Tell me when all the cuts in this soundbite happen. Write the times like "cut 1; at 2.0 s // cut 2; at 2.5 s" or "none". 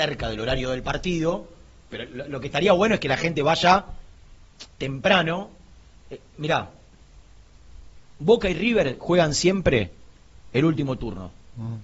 none